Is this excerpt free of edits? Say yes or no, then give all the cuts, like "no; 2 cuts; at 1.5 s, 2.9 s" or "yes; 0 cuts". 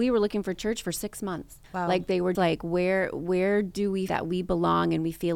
no; 3 cuts; at 1.6 s, 2.3 s, 4.1 s